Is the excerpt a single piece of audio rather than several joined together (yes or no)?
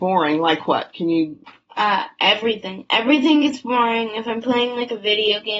yes